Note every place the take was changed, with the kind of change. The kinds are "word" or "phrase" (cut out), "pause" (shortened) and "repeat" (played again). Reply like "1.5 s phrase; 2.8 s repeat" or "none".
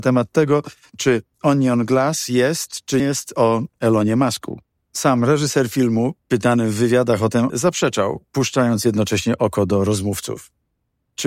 3.0 s word; 7.5 s word